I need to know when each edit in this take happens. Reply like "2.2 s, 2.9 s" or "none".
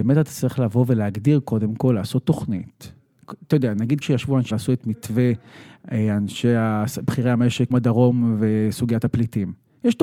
4.0 s, 4.5 s, 7.7 s

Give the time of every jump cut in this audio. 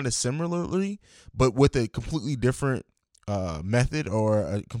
none

